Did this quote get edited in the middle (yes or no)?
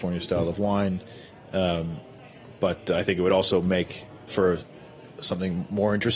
no